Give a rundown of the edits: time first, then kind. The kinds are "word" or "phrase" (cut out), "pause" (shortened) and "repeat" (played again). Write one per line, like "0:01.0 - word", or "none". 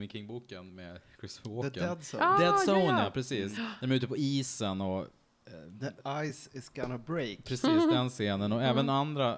none